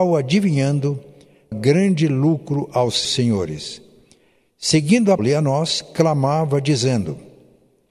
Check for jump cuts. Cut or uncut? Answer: cut